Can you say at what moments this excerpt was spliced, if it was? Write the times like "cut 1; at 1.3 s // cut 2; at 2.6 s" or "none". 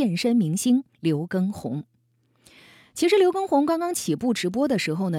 cut 1; at 0.9 s